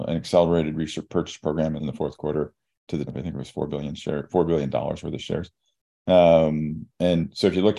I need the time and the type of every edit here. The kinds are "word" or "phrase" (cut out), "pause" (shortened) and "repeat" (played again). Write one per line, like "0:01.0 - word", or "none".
0:01.8 - word
0:03.1 - word